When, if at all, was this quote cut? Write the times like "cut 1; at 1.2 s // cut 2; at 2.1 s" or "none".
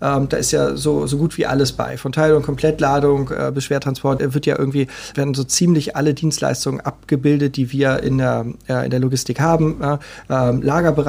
cut 1; at 4.2 s // cut 2; at 5.1 s